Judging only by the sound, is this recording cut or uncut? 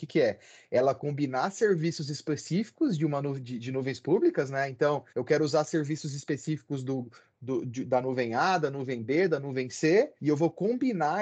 cut